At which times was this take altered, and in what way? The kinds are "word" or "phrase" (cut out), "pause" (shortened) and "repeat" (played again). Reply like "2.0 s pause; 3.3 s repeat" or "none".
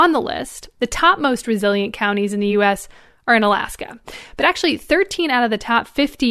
none